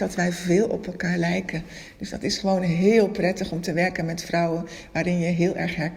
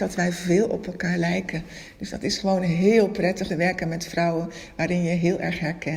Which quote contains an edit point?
second; 1 cut; at 3.5 s

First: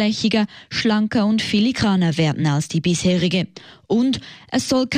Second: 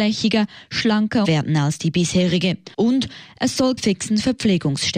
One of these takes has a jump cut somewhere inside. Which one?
second; 3 cuts; at 1.2 s, 2.7 s, 3.8 s

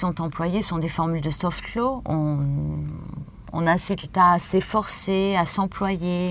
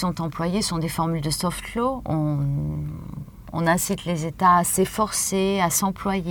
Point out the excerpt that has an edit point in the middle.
first; 1 cut; at 4.0 s

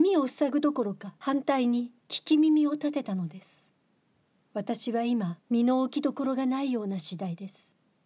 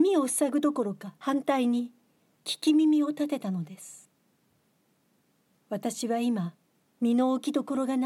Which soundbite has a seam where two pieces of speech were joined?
first; 3 cuts; at 2.0 s, 4.3 s, 5.4 s

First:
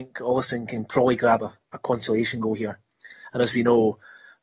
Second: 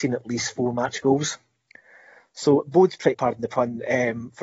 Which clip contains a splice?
second; 1 cut; at 3.1 s

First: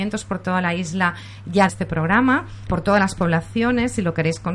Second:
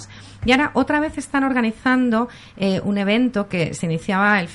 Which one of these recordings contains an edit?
first; 2 cuts; at 1.7 s, 2.7 s

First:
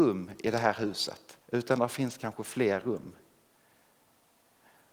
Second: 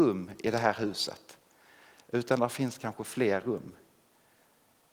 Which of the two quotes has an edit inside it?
first; 1 cut; at 1.4 s

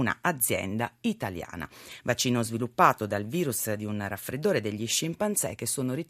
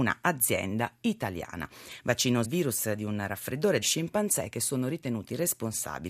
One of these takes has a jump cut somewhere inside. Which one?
second; 2 cuts; at 2.4 s, 3.8 s

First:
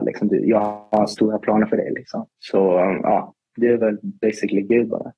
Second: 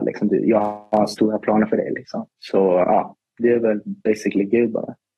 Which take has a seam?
second; 1 cut; at 2.8 s

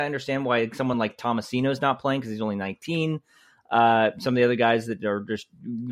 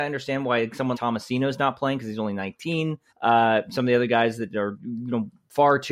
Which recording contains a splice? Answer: second; 3 cuts; at 0.9 s, 3.1 s, 4.7 s

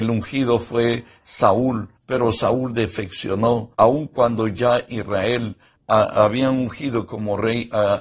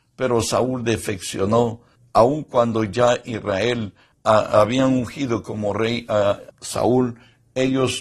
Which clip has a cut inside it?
first; 2 cuts; at 2.0 s, 3.7 s

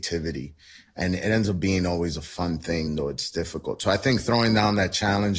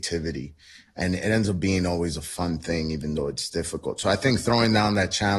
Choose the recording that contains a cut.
first; 1 cut; at 2.9 s

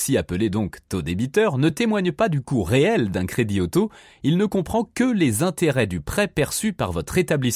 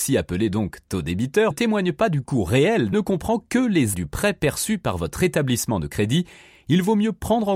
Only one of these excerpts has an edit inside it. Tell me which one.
second; 3 cuts; at 1.5 s, 2.9 s, 3.9 s

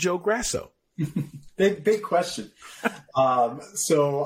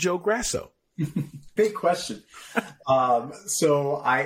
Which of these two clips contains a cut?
second; 1 cut; at 1.6 s

